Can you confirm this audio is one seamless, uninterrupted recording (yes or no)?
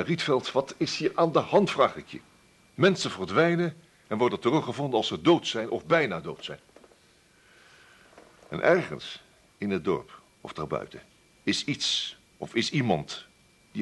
no